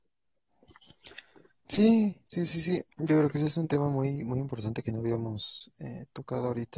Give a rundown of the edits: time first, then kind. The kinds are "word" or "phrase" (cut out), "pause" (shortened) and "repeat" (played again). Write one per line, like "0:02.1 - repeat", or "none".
0:02.9 - pause